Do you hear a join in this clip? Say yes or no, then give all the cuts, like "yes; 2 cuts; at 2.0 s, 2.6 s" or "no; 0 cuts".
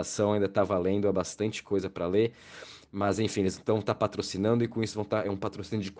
no; 0 cuts